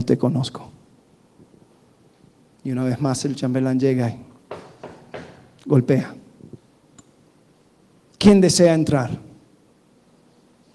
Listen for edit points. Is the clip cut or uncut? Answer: uncut